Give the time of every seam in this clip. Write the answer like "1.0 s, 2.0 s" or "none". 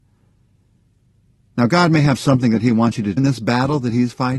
3.2 s